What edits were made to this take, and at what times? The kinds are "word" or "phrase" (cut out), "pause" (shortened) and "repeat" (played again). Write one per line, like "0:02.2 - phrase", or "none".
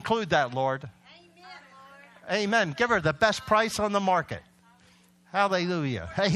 none